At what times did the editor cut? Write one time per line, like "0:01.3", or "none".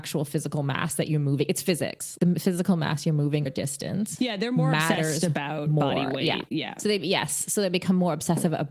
0:02.2
0:03.5